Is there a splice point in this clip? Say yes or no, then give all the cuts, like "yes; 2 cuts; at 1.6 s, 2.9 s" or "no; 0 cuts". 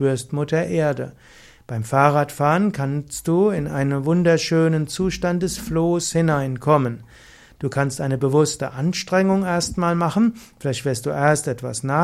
no; 0 cuts